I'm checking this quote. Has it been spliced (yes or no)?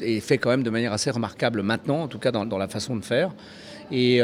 yes